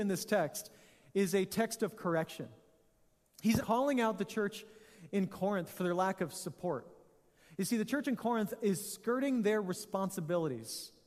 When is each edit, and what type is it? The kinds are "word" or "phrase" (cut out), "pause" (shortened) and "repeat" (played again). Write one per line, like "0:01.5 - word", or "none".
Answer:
0:03.6 - word

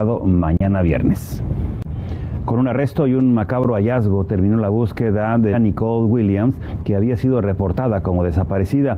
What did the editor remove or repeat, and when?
0:05.5 - phrase

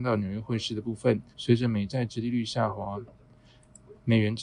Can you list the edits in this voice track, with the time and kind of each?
0:01.3 - pause

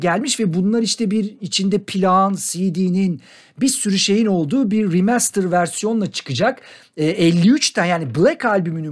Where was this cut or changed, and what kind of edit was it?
none

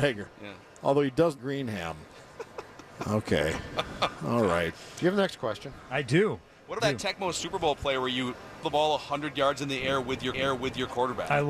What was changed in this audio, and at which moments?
0:01.4 - word
0:02.3 - pause
0:06.8 - word
0:08.6 - phrase
0:10.3 - repeat

